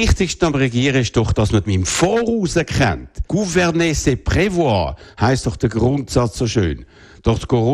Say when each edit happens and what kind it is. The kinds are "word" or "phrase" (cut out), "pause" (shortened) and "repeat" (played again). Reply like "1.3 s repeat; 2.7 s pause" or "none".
1.7 s word; 3.3 s pause

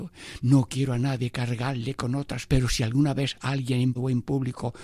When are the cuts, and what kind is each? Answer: 2.5 s word; 3.9 s word

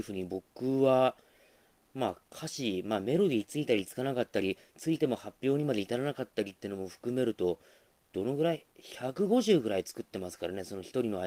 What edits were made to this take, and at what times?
none

